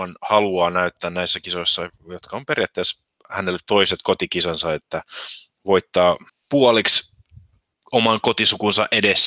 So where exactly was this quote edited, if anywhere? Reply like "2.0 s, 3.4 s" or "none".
6.3 s